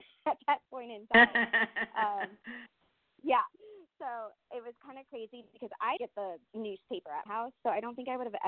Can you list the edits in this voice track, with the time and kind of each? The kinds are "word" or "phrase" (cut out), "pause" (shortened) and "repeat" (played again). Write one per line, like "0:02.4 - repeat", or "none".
0:06.0 - word
0:07.3 - word